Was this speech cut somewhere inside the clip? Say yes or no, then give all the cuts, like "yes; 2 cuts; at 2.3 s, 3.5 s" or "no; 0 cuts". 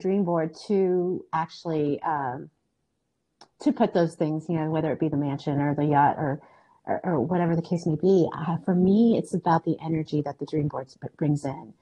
no; 0 cuts